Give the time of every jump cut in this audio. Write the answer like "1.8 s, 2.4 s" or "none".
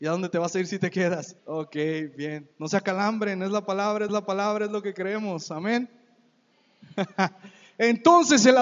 1.4 s, 2.5 s, 4.1 s